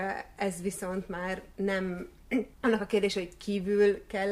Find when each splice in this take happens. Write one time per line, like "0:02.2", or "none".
0:02.5